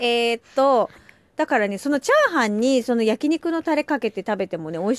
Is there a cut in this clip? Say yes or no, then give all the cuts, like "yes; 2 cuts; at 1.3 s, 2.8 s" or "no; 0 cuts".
no; 0 cuts